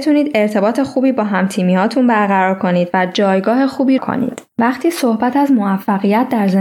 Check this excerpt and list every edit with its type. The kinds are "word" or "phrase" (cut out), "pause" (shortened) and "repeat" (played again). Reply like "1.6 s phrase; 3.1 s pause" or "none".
4.0 s phrase